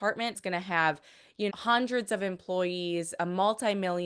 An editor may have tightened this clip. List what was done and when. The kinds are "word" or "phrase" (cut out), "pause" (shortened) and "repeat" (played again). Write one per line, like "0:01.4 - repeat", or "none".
0:01.5 - word